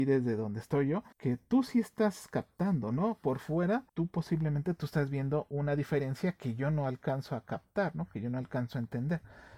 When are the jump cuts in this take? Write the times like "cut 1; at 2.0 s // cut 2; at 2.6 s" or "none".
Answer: cut 1; at 1.1 s // cut 2; at 3.9 s